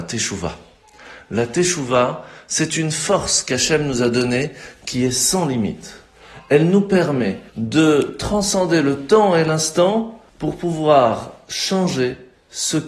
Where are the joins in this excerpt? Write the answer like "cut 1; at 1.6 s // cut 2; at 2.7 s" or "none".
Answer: cut 1; at 7.5 s // cut 2; at 10.3 s